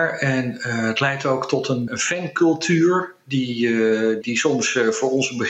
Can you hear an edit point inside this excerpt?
yes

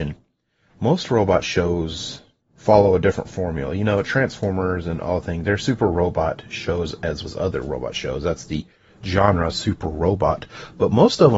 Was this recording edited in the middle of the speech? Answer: yes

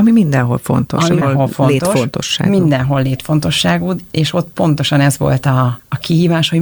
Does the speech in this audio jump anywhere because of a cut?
yes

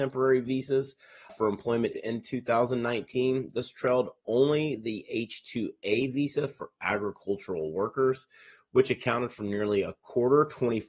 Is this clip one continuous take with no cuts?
no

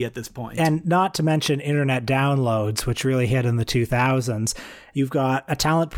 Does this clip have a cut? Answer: no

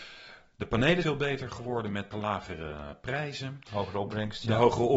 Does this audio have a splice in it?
yes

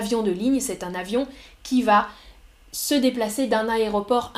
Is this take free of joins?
yes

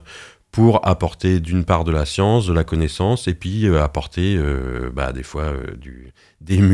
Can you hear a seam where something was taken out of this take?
no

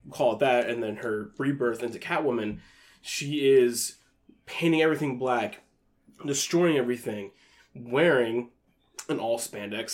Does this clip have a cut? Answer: no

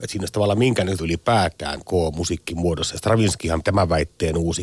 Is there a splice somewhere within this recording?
yes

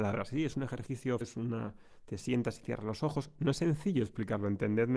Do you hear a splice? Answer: yes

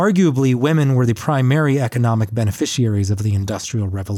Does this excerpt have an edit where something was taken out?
no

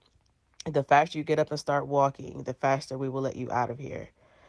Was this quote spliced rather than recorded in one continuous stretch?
no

